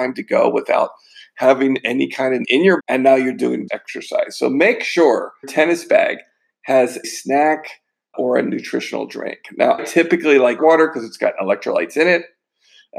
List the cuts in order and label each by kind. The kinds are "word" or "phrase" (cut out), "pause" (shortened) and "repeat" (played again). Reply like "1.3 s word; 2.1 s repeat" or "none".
2.4 s word; 2.8 s word; 3.7 s word; 5.4 s word; 7.0 s word; 8.1 s word; 9.8 s word; 10.6 s word